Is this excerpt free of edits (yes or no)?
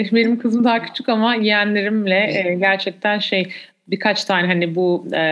yes